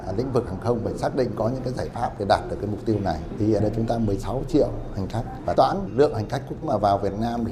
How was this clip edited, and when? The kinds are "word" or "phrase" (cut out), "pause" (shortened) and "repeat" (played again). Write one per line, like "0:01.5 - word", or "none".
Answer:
0:03.6 - word
0:05.5 - word
0:05.9 - word
0:06.6 - word